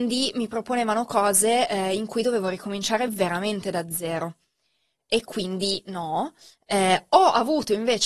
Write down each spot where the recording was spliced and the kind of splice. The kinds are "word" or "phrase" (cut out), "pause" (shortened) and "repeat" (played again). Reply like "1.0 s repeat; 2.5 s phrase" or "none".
none